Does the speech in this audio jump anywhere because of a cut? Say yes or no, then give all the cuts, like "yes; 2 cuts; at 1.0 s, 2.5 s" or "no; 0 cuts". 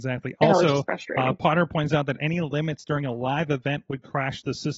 no; 0 cuts